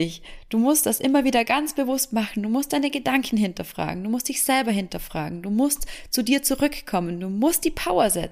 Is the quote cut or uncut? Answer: uncut